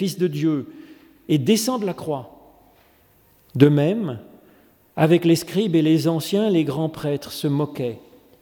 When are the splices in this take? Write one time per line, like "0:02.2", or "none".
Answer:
none

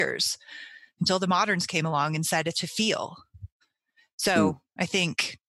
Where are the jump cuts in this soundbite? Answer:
0:02.5

